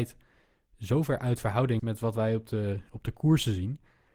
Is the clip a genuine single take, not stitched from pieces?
no; 1 cut; at 1.8 s

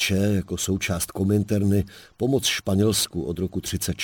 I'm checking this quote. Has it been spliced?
no; 0 cuts

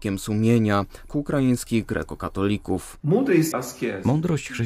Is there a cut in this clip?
yes; 2 cuts; at 1.1 s, 3.5 s

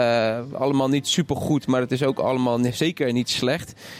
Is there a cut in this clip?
no; 0 cuts

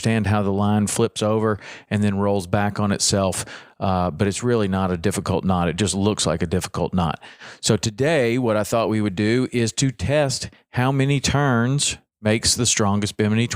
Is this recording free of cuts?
yes; 0 cuts

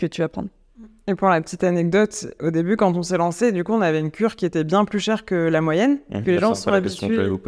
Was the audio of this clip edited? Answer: yes; 2 cuts; at 2.4 s, 6.2 s

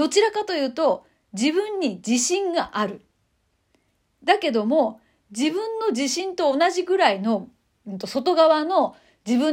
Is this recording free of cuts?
yes; 0 cuts

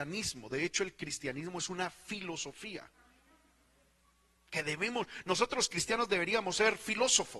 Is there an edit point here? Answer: no; 0 cuts

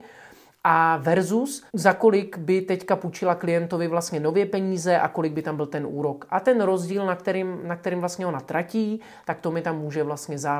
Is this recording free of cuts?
no; 1 cut; at 1.7 s

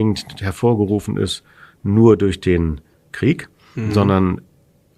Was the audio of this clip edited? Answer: no; 0 cuts

